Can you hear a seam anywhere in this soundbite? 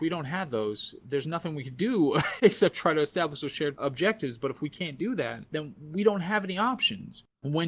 no; 0 cuts

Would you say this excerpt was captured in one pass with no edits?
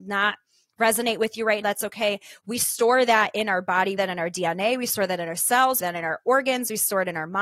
no; 3 cuts; at 1.6 s, 4.0 s, 5.8 s

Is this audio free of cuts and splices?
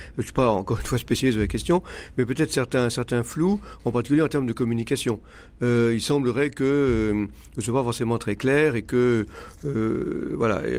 yes; 0 cuts

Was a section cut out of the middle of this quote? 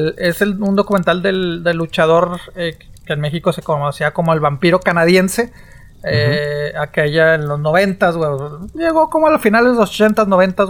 no; 0 cuts

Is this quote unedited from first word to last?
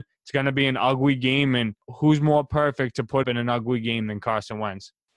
no; 2 cuts; at 1.8 s, 3.2 s

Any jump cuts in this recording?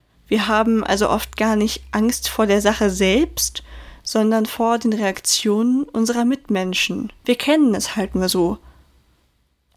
yes; 1 cut; at 7.2 s

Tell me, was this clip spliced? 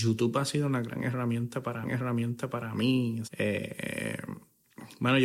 yes; 2 cuts; at 1.8 s, 3.2 s

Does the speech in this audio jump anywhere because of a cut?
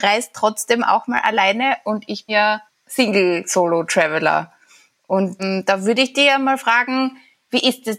yes; 3 cuts; at 2.3 s, 2.7 s, 5.4 s

